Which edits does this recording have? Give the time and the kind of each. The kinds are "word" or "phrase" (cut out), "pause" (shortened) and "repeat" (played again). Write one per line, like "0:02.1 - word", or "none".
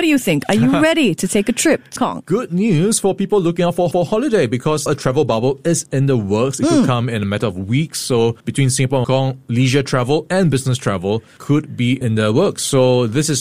0:02.0 - phrase
0:03.9 - repeat
0:04.9 - word
0:08.4 - pause
0:09.0 - phrase
0:12.0 - word

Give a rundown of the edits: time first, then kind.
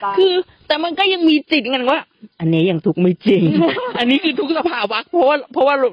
0:02.3 - pause

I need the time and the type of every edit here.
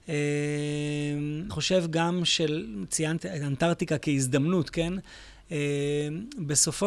0:01.5 - word
0:03.2 - phrase

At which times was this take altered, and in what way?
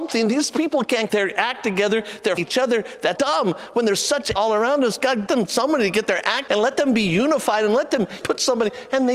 0:01.1 - word
0:02.4 - word
0:03.2 - word
0:04.4 - word
0:05.3 - word
0:06.5 - word
0:08.2 - word

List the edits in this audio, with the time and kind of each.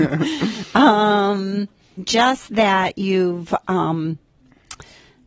0:02.0 - phrase

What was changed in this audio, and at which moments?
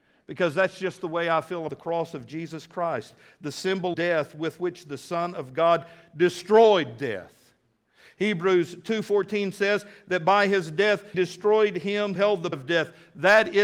0:01.7 - word
0:03.9 - word
0:11.1 - word
0:12.2 - word
0:12.5 - word

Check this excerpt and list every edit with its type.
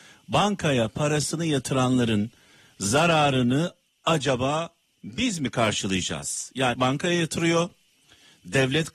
0:06.7 - phrase

